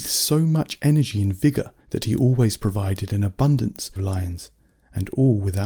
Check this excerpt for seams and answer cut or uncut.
cut